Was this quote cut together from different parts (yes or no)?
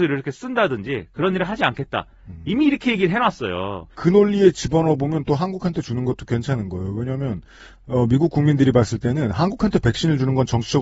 yes